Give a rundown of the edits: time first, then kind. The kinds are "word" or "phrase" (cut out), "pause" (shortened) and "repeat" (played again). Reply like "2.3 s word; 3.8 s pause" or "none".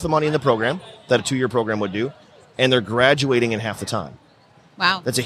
1.2 s word